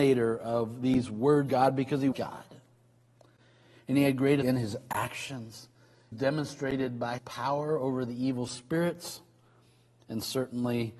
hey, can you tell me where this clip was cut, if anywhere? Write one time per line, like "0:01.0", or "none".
0:01.5
0:02.1
0:04.4
0:06.1
0:07.2